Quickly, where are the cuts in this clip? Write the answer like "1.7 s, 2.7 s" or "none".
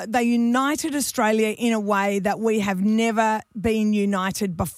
none